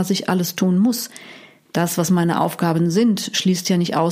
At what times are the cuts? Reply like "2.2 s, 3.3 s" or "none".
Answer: none